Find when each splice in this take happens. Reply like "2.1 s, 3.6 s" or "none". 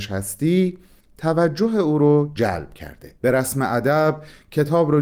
3.2 s